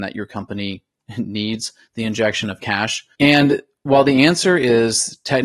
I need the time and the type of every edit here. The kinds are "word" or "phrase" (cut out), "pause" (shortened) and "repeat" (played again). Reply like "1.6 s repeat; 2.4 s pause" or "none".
3.1 s pause